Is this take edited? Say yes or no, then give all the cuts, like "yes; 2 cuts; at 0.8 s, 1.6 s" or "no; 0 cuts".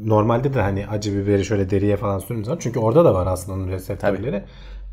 no; 0 cuts